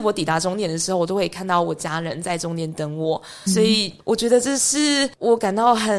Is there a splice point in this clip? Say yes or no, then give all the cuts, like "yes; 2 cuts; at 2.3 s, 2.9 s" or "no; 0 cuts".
yes; 1 cut; at 3.5 s